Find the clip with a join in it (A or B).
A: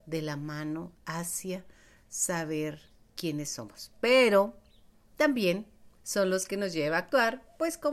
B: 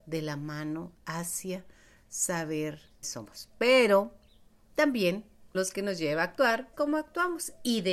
B